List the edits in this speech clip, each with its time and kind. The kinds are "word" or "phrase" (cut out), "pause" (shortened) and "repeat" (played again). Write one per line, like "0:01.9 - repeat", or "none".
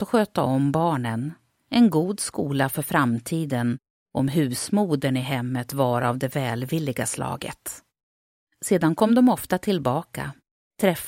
none